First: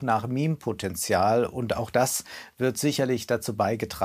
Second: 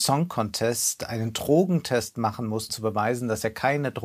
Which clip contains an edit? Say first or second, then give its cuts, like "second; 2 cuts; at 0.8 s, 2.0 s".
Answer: second; 1 cut; at 2.7 s